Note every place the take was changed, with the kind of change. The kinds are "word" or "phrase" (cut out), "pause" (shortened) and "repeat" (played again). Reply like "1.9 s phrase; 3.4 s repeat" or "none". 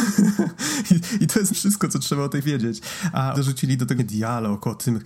1.5 s word; 2.4 s word; 3.3 s word; 4.0 s word